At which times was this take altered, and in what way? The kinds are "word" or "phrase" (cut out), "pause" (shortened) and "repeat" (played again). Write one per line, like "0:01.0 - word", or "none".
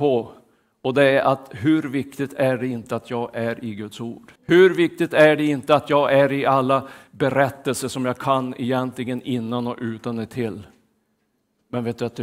0:04.4 - pause